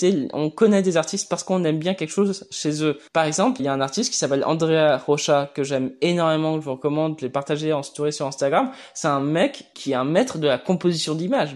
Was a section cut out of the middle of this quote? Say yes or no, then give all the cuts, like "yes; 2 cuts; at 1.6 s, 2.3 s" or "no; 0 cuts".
yes; 3 cuts; at 3.1 s, 3.6 s, 9.7 s